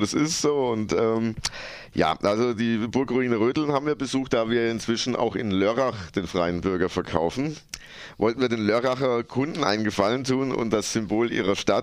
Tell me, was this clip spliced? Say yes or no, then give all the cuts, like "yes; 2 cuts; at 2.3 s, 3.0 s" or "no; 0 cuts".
no; 0 cuts